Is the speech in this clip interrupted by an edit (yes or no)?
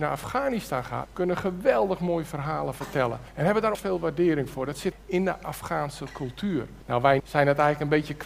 yes